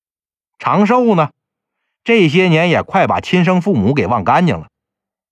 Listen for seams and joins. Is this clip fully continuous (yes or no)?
yes